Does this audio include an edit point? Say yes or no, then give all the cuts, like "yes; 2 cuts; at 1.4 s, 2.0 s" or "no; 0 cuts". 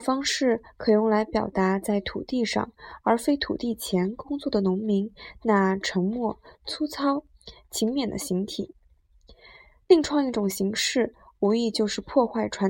no; 0 cuts